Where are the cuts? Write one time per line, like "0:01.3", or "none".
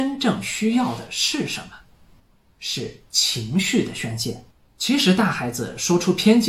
0:04.5